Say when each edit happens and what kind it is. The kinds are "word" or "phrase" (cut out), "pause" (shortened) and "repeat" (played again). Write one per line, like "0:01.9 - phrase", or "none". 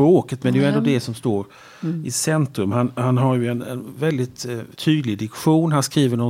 0:04.7 - pause